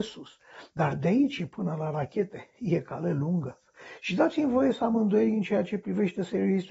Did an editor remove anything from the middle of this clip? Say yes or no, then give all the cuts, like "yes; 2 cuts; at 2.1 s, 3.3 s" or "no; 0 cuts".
no; 0 cuts